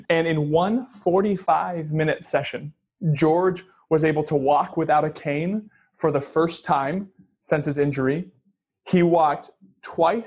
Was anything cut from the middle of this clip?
no; 0 cuts

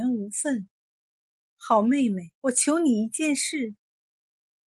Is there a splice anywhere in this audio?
yes; 1 cut; at 2.4 s

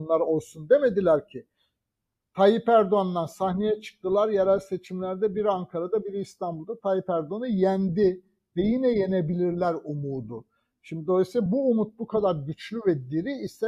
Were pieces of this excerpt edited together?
no; 0 cuts

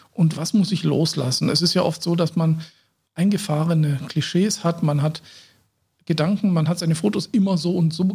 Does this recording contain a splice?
no; 0 cuts

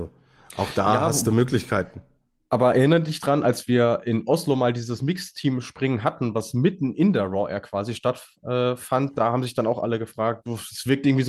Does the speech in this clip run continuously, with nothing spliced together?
yes; 0 cuts

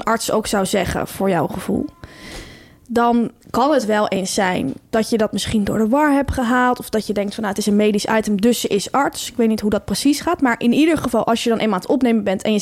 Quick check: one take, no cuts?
yes; 0 cuts

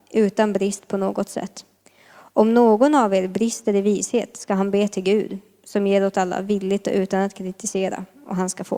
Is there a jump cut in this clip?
no; 0 cuts

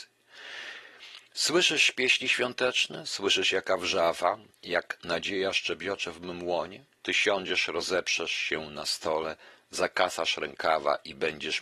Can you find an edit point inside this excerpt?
yes; 1 cut; at 6.9 s

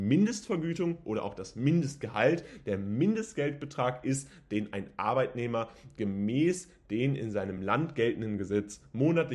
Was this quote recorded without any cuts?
yes; 0 cuts

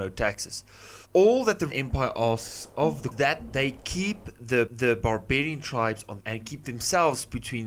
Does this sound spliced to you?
yes; 5 cuts; at 1.0 s, 1.7 s, 3.1 s, 4.7 s, 6.2 s

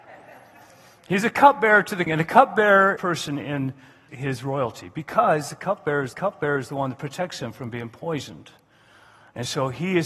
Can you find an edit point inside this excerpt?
yes; 4 cuts; at 2.1 s, 3.0 s, 4.1 s, 6.1 s

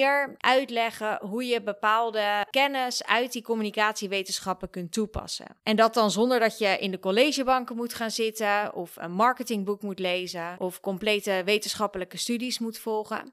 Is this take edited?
no; 0 cuts

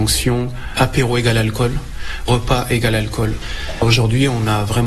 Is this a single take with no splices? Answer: yes; 0 cuts

